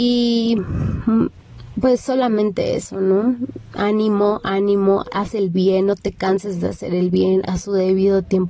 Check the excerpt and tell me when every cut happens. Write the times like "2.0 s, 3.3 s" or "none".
5.0 s, 7.5 s